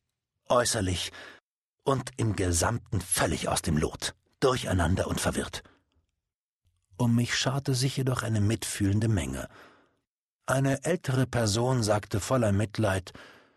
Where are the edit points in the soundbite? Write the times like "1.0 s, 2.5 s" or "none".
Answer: none